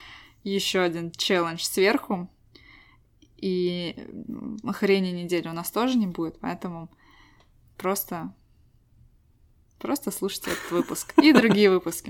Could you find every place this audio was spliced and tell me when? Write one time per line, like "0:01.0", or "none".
none